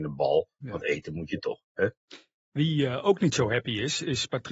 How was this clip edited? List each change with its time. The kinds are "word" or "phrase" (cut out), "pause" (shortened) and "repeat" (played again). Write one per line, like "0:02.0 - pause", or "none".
none

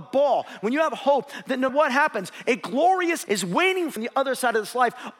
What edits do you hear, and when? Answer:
0:01.7 - word
0:03.3 - word
0:04.0 - word

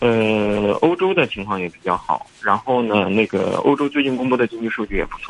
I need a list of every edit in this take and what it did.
0:02.3 - pause

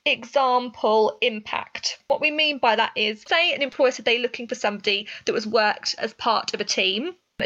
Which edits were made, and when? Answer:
0:06.0 - word

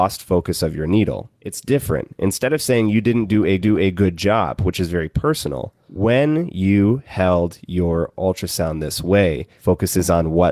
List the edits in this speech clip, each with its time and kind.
0:03.6 - repeat

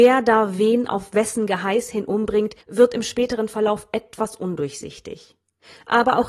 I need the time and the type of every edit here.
0:02.6 - pause

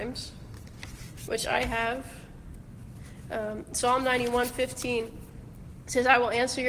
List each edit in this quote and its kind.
none

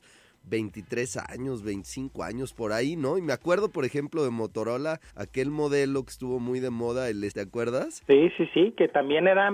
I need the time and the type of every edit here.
0:05.1 - pause
0:07.3 - word

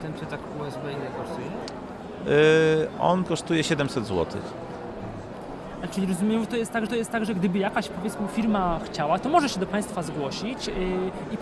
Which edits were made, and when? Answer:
0:03.3 - word
0:06.9 - repeat

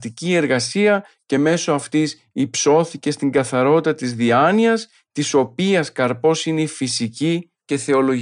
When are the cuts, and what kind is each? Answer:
none

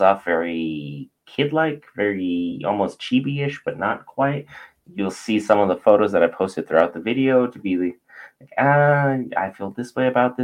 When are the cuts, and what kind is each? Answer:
none

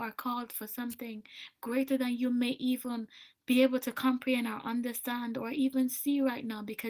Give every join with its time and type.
0:03.3 - pause

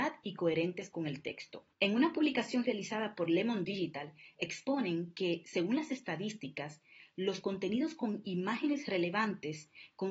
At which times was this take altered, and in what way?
0:01.7 - pause

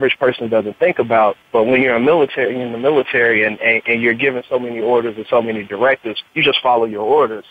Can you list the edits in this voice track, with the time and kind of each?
0:01.4 - pause
0:06.3 - pause

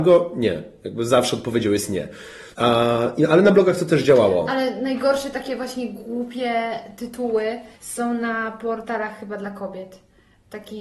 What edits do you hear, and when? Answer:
0:02.5 - pause
0:07.7 - pause

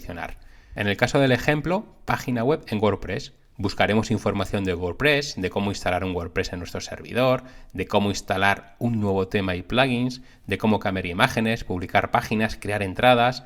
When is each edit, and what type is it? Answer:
none

